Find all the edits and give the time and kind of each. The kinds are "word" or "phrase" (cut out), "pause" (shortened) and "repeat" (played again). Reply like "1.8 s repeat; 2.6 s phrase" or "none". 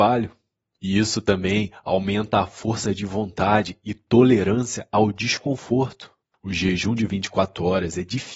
none